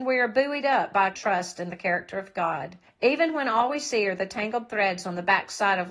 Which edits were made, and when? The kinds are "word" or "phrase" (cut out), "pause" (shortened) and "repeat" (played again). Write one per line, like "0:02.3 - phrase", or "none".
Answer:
0:01.1 - word
0:02.8 - pause